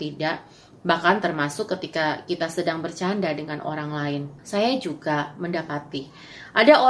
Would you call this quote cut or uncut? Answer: cut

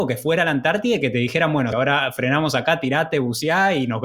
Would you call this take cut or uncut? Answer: cut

